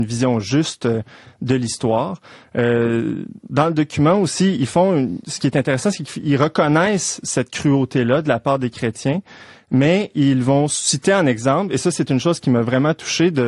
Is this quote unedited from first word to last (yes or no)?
yes